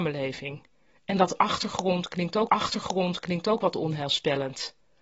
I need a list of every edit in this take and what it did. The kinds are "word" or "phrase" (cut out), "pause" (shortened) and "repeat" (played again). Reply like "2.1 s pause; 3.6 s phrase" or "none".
0.9 s pause; 2.5 s repeat